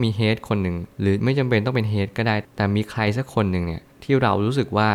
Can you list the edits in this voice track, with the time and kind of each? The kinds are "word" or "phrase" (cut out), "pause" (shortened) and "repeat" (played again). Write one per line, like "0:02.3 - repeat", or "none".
0:00.9 - pause

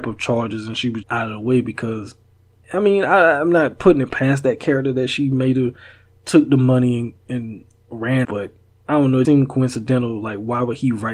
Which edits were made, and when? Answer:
0:01.0 - word
0:02.6 - word
0:08.2 - word
0:09.2 - word

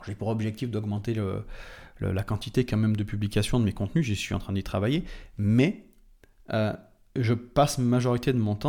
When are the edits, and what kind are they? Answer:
none

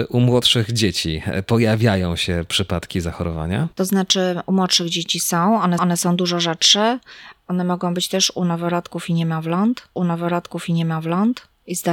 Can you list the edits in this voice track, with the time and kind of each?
0:03.7 - pause
0:05.8 - repeat
0:10.0 - repeat

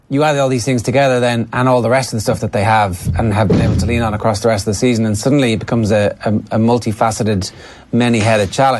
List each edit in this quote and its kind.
none

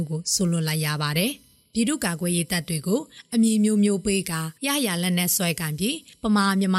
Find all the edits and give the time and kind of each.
0:04.6 - pause

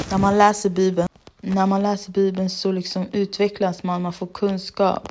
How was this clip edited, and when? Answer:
none

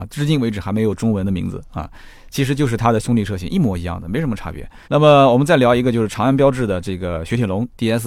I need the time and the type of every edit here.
0:04.8 - pause

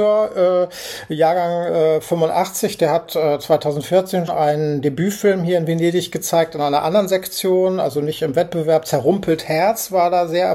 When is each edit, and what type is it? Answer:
0:04.3 - word

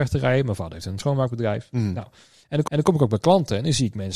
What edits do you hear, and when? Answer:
0:01.0 - word
0:02.7 - repeat

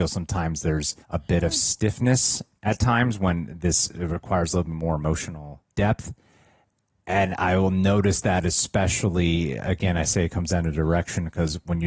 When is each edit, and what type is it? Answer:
0:01.0 - pause
0:05.7 - pause

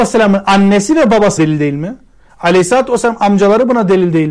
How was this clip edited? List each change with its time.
0:01.4 - word

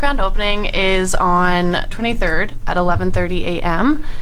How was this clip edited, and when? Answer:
0:01.9 - word

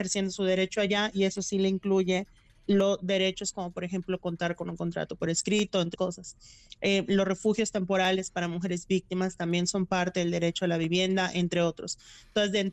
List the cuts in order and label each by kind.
0:05.9 - word

